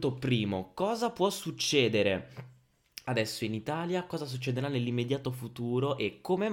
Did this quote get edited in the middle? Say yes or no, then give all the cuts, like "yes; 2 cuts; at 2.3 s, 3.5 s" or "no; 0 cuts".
no; 0 cuts